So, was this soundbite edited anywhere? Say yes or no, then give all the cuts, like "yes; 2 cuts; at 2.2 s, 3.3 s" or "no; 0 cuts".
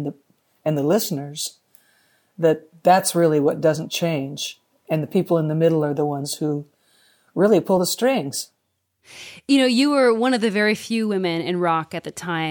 no; 0 cuts